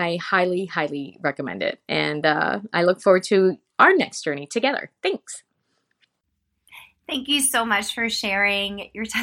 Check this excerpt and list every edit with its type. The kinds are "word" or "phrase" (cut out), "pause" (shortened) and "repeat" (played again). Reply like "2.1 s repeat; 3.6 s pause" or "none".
none